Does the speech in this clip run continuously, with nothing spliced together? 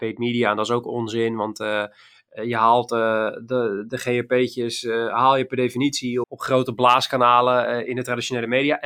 no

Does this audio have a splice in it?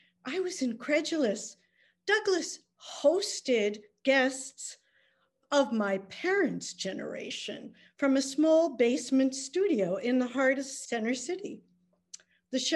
no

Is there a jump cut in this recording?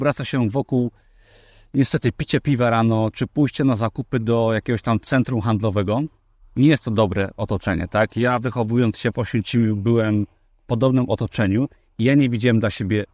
no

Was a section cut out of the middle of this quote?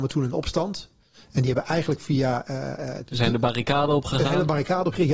no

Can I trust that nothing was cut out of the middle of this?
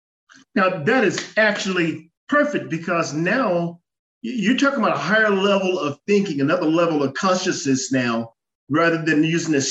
no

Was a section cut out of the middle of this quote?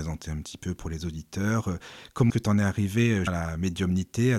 yes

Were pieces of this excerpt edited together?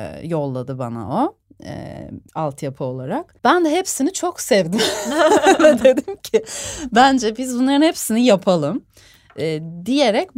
yes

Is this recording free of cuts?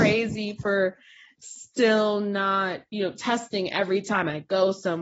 yes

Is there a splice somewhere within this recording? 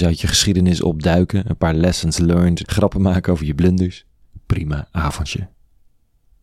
yes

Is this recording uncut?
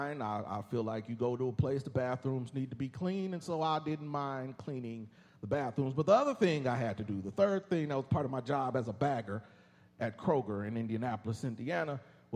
yes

